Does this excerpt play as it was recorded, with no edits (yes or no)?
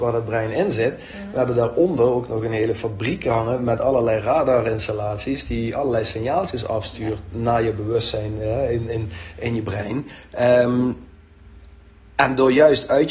yes